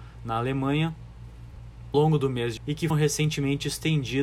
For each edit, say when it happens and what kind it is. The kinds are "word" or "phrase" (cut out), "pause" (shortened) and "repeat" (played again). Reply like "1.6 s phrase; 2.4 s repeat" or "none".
1.9 s word; 2.6 s word; 2.9 s word